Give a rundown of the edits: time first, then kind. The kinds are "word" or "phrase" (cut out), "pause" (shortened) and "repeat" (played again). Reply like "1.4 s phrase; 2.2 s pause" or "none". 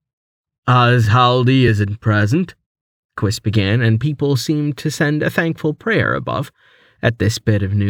none